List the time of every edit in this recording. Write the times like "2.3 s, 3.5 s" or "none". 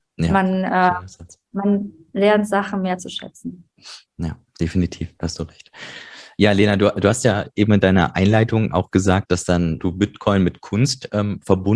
9.3 s, 9.8 s